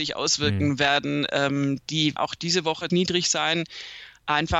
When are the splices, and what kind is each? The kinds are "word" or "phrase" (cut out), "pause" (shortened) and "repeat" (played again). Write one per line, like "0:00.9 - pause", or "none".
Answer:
0:02.2 - word
0:02.9 - word

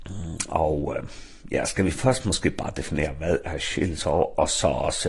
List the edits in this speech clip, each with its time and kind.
none

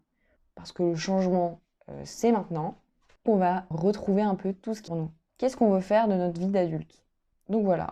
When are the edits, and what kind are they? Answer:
0:03.3 - word
0:03.7 - word
0:04.9 - phrase
0:05.2 - pause

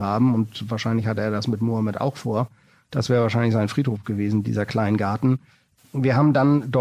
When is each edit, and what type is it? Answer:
none

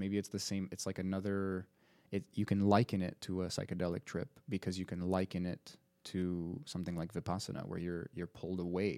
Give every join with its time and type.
none

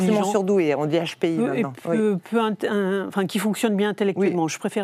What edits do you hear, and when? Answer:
none

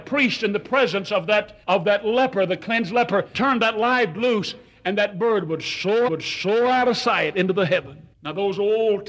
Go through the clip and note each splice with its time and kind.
0:01.6 - pause
0:03.3 - word
0:04.1 - word
0:06.1 - repeat
0:08.1 - pause

